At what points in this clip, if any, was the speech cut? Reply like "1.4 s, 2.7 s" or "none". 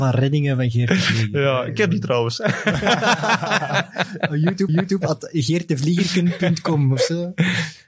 4.7 s